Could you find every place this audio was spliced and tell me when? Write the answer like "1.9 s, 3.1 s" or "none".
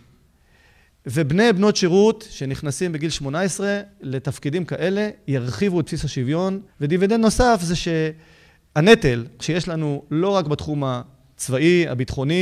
6.7 s